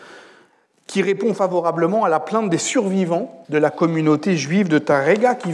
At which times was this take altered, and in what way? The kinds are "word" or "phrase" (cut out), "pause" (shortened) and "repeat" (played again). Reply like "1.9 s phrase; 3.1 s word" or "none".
3.4 s pause